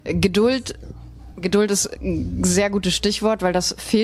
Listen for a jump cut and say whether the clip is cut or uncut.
uncut